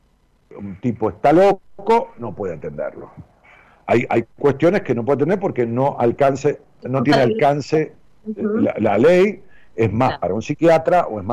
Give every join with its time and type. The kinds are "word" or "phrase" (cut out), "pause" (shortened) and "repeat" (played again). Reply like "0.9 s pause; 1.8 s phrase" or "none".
none